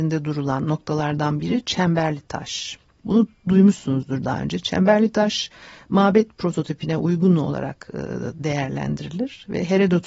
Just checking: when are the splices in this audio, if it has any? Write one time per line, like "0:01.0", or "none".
none